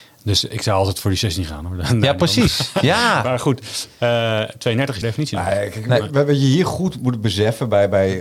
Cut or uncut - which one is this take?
cut